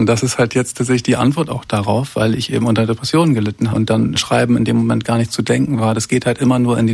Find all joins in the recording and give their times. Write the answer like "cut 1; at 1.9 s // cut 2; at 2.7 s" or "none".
cut 1; at 3.7 s // cut 2; at 4.2 s